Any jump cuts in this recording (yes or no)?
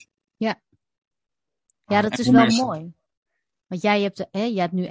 no